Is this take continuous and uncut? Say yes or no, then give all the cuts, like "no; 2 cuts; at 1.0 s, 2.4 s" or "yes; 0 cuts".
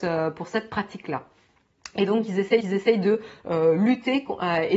no; 1 cut; at 2.6 s